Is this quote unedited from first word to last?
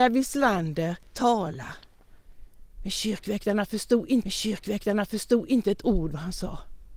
no; 2 cuts; at 1.1 s, 4.2 s

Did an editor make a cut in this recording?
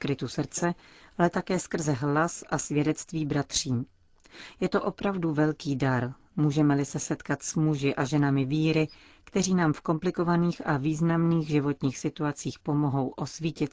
no; 0 cuts

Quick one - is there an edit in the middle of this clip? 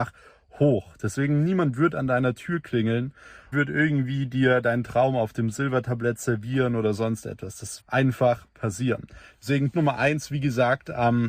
yes; 4 cuts; at 3.5 s, 7.8 s, 8.5 s, 9.7 s

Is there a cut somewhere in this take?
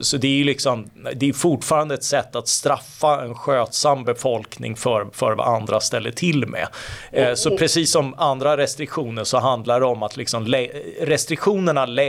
no; 0 cuts

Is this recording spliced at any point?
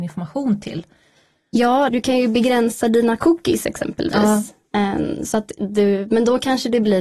yes; 1 cut; at 1.9 s

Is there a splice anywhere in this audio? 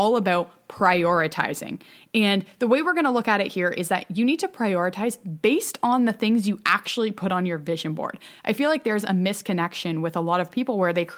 no; 0 cuts

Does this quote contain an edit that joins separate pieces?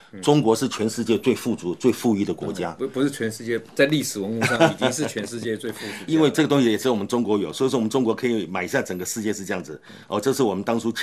yes; 1 cut; at 6.1 s

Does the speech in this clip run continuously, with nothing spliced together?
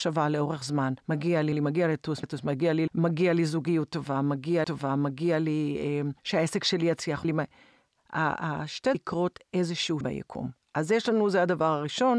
no; 9 cuts; at 1.0 s, 1.5 s, 2.2 s, 2.9 s, 4.6 s, 6.2 s, 7.2 s, 8.9 s, 10.0 s

